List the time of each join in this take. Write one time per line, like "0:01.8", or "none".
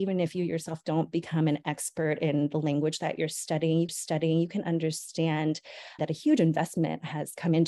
0:03.9
0:06.0